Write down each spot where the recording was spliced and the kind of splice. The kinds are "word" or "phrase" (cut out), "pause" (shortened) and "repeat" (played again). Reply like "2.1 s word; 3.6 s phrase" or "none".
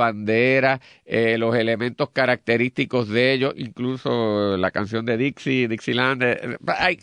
none